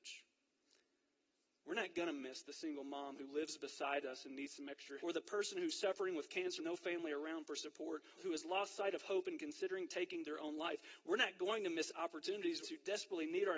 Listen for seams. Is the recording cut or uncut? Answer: cut